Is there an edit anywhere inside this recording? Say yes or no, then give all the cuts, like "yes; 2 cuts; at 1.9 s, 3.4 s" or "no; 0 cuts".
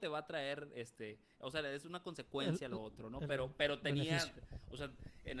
no; 0 cuts